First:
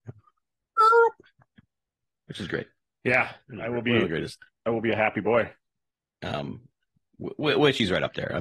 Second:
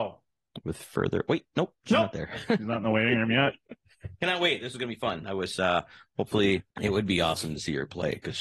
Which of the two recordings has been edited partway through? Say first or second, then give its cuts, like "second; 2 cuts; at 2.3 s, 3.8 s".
second; 1 cut; at 6.7 s